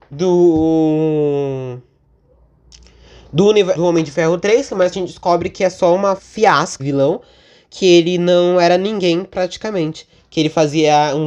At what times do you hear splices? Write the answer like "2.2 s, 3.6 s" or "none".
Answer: 3.7 s, 4.9 s, 6.2 s, 6.8 s